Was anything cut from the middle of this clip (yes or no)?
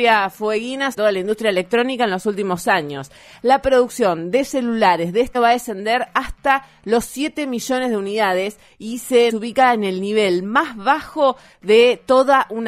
yes